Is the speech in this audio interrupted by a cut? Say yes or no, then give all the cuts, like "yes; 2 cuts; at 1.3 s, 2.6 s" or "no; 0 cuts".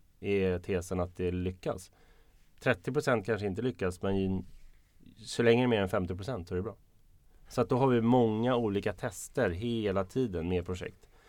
no; 0 cuts